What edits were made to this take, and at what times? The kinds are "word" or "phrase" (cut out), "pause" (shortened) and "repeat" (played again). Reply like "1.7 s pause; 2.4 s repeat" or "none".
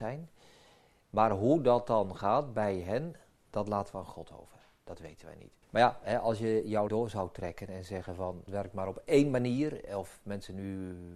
5.6 s pause; 6.9 s word; 8.5 s word